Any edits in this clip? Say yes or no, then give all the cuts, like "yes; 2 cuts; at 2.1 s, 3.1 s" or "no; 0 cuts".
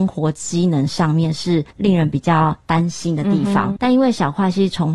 yes; 2 cuts; at 1.7 s, 3.8 s